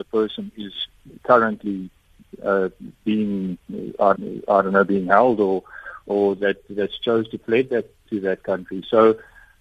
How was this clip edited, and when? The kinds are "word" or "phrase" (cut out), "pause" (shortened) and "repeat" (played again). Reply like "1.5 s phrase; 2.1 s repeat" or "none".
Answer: 4.1 s repeat